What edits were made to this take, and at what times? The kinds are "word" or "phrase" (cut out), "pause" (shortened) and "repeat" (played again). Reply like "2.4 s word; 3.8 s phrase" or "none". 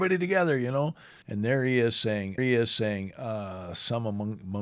1.2 s pause; 2.4 s repeat